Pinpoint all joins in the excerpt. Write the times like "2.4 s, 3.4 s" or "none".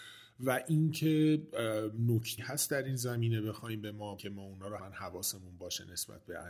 2.4 s, 4.2 s, 4.8 s